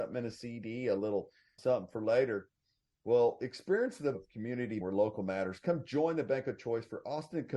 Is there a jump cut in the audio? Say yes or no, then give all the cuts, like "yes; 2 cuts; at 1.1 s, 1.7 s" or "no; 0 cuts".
yes; 3 cuts; at 1.6 s, 4.1 s, 4.8 s